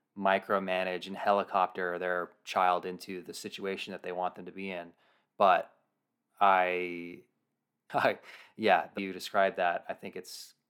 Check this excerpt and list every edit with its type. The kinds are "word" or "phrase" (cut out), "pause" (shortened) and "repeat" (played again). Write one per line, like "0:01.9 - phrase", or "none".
0:07.9 - word
0:09.0 - word